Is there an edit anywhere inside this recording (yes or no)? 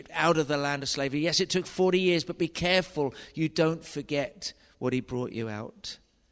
no